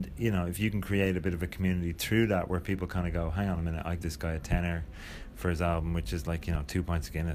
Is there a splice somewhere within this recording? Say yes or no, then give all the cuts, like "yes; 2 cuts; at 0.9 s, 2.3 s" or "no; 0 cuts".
yes; 1 cut; at 4.0 s